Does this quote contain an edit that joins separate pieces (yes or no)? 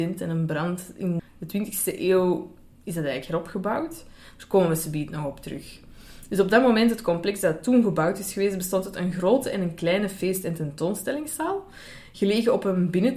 yes